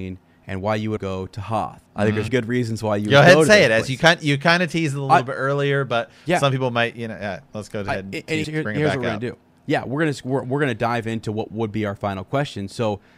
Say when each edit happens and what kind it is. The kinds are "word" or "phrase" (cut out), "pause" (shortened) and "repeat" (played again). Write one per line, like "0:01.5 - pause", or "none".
0:01.0 - word
0:01.9 - pause
0:02.3 - word
0:08.4 - word